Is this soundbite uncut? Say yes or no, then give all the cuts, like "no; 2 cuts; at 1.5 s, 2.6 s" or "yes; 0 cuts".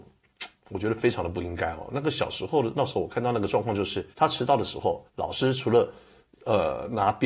no; 2 cuts; at 4.1 s, 5.1 s